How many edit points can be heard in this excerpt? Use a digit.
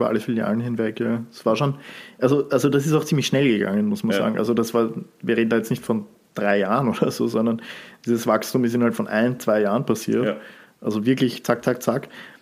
0